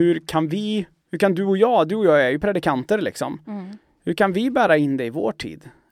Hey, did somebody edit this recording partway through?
no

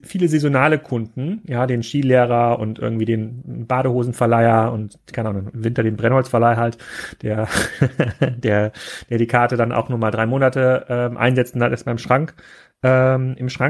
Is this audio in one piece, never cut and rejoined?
yes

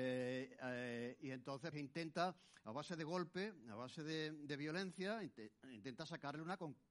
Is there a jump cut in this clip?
yes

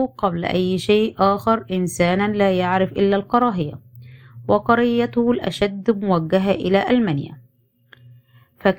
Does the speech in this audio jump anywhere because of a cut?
no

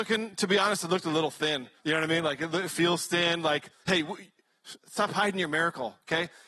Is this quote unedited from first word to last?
no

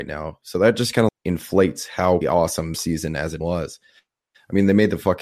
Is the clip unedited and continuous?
no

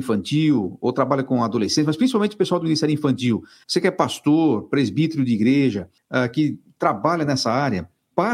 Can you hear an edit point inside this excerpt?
no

